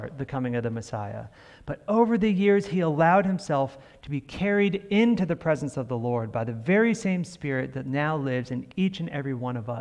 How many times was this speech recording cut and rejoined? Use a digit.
0